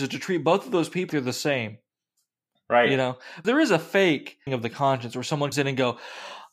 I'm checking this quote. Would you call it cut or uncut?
cut